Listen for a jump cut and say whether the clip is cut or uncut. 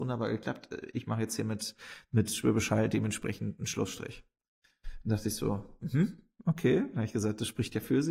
uncut